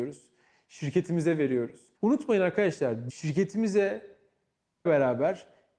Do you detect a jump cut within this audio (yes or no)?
yes